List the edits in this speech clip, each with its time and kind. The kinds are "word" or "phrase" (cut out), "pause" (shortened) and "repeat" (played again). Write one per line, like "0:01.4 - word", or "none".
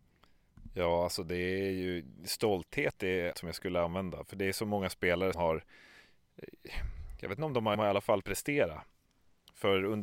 0:03.3 - phrase
0:05.3 - word
0:07.7 - phrase
0:08.2 - word